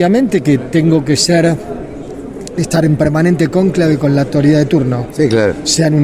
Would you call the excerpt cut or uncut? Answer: uncut